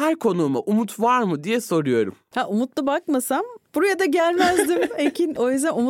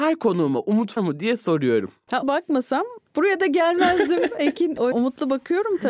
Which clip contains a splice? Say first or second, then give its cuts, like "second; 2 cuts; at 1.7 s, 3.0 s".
second; 3 cuts; at 1.0 s, 2.2 s, 4.9 s